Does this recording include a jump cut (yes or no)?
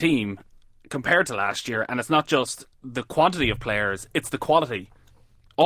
no